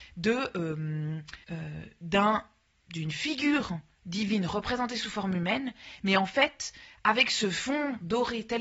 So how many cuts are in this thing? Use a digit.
1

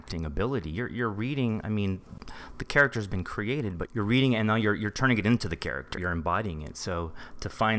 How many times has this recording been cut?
2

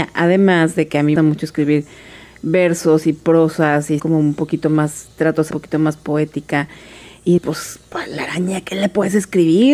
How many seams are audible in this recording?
4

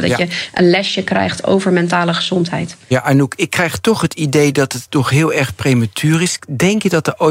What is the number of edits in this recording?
0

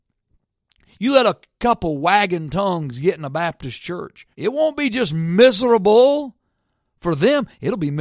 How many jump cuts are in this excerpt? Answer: 1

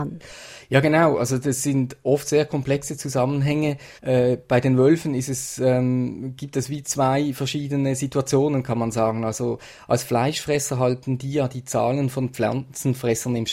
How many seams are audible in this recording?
1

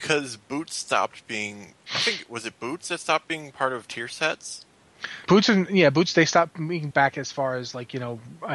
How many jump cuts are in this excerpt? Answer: 2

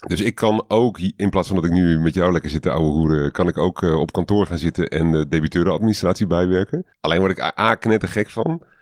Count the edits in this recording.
1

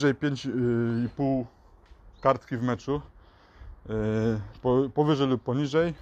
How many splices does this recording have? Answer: 0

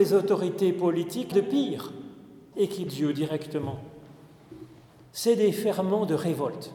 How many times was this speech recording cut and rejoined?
3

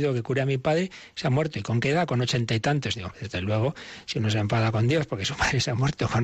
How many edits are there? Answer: 1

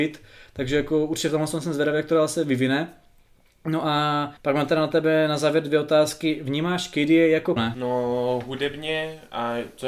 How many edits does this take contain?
2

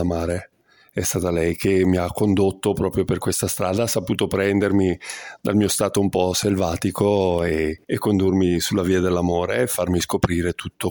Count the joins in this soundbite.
1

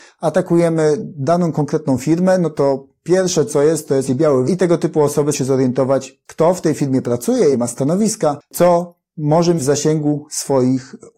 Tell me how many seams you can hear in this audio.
5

